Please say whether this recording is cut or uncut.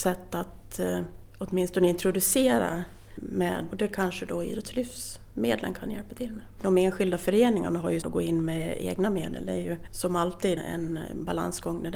cut